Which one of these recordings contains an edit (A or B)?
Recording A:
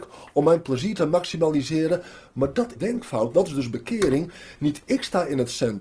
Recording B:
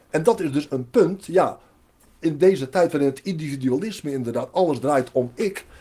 A